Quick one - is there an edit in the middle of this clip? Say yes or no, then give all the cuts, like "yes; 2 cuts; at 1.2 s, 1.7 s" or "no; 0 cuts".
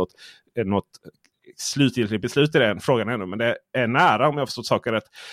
no; 0 cuts